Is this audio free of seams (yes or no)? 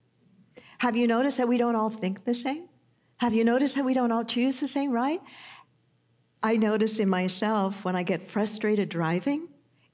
yes